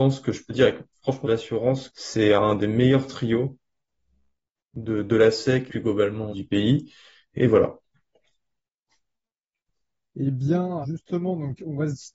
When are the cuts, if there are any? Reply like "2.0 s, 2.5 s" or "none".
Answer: 1.2 s, 1.9 s, 5.7 s, 6.3 s, 7.4 s, 10.8 s

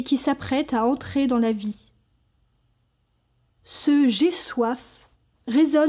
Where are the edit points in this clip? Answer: none

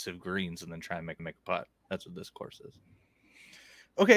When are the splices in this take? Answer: 1.2 s, 1.8 s

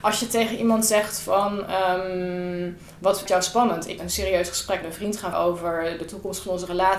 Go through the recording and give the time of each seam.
3.3 s, 4.0 s, 4.8 s, 5.3 s

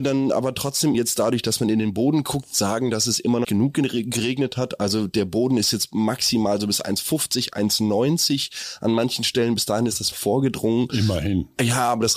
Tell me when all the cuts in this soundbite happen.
0.9 s, 3.4 s, 10.1 s

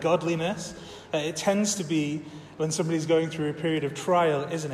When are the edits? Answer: none

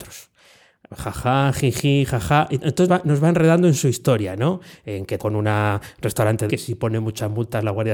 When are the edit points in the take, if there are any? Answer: 2.9 s, 5.2 s, 6.5 s

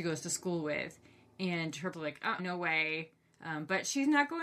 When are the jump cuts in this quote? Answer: 1.9 s, 2.4 s

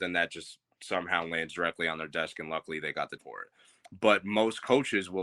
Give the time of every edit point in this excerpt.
3.2 s

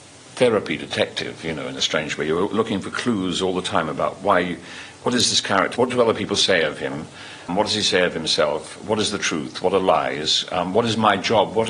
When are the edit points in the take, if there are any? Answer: 5.7 s, 7.5 s

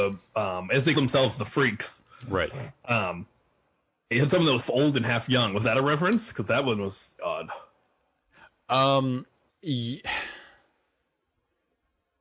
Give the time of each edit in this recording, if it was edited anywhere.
0.9 s, 4.1 s, 4.6 s, 7.2 s, 9.5 s

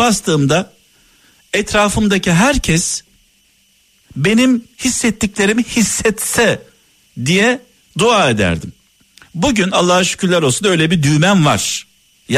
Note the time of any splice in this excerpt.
none

